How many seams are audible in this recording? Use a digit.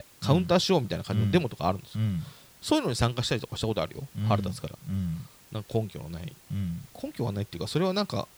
0